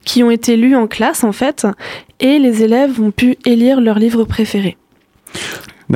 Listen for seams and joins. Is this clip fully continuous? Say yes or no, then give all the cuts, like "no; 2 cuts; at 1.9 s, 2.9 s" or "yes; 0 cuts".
yes; 0 cuts